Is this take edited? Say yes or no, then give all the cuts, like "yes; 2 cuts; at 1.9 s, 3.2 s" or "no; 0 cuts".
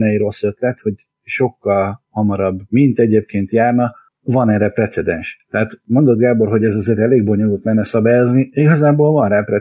no; 0 cuts